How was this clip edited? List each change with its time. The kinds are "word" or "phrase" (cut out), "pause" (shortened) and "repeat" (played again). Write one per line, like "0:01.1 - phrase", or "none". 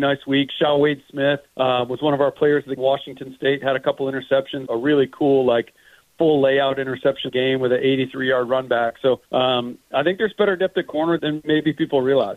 0:01.5 - pause
0:02.8 - phrase
0:04.7 - word
0:07.3 - phrase
0:09.2 - pause
0:11.2 - word